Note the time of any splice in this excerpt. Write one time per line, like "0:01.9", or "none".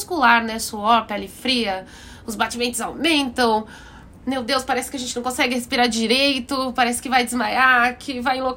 none